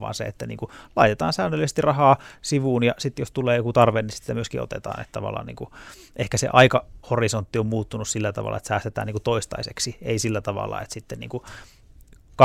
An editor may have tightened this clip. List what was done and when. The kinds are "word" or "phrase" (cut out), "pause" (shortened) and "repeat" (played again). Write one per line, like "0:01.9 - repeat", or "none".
0:07.0 - pause